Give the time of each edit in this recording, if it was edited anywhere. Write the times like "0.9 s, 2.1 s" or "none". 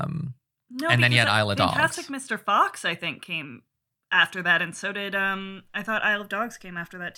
none